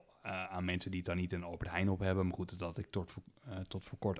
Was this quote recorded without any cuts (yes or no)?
yes